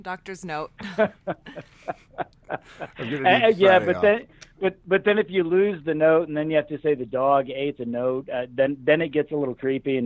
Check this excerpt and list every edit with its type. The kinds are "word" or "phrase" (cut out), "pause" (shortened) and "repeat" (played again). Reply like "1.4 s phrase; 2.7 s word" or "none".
none